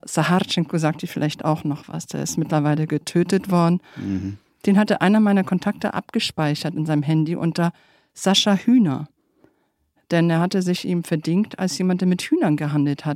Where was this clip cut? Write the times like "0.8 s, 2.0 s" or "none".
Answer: none